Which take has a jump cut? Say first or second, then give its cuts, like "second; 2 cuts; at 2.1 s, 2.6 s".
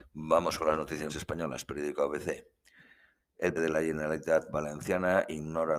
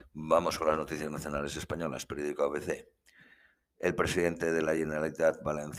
first; 2 cuts; at 1.1 s, 3.6 s